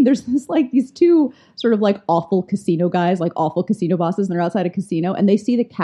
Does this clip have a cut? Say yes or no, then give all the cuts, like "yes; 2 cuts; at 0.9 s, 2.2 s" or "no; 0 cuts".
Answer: no; 0 cuts